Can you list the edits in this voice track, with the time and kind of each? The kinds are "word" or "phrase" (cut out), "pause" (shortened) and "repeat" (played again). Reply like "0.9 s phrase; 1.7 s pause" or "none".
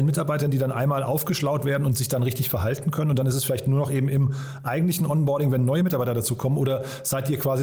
none